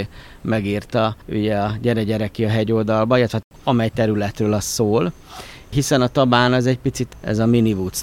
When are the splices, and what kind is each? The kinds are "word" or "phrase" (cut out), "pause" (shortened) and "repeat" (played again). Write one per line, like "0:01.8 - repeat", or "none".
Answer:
0:01.2 - pause